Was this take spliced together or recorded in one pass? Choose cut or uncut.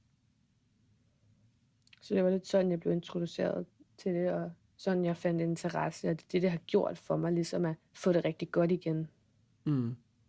cut